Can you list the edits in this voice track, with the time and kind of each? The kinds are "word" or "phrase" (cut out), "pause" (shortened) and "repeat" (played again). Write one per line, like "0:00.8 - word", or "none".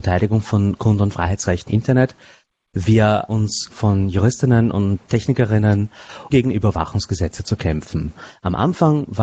0:01.7 - word
0:03.3 - word
0:03.7 - phrase
0:06.3 - word